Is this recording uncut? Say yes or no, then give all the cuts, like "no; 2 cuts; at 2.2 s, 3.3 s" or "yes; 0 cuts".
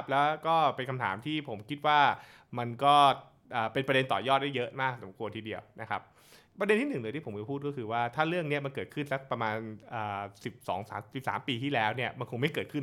yes; 0 cuts